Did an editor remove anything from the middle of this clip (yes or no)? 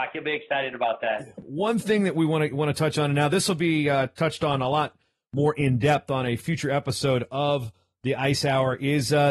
no